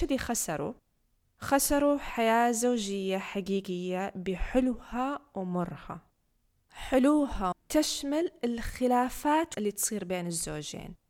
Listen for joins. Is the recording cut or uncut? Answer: cut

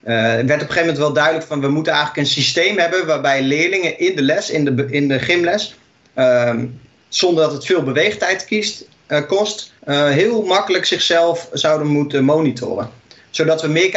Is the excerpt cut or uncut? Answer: cut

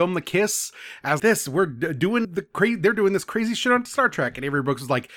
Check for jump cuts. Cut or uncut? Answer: cut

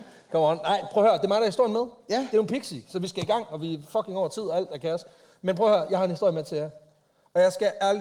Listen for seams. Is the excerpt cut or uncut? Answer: uncut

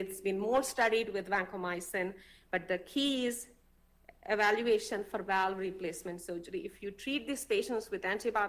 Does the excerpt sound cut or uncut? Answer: uncut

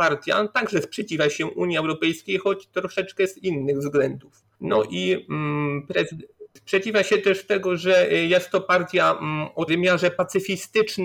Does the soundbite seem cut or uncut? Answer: cut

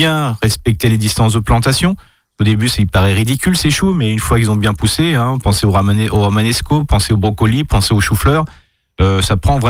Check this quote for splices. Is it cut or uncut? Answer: uncut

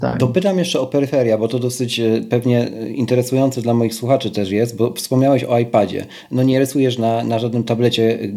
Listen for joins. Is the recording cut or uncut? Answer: uncut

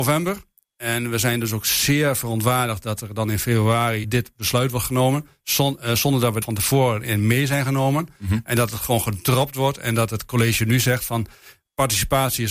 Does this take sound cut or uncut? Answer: cut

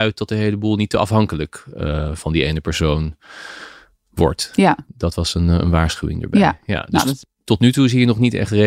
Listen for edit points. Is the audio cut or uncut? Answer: uncut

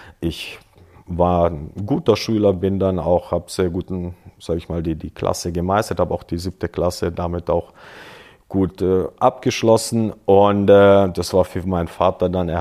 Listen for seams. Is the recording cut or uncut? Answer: uncut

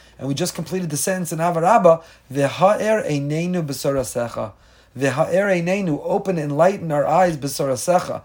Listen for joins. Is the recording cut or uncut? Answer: uncut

